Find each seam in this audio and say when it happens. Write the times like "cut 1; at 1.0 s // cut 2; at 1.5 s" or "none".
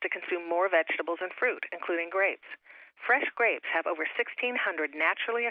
none